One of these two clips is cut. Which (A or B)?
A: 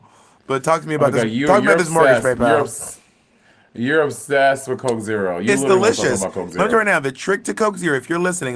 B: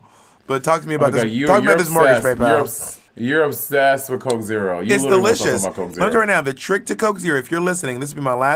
B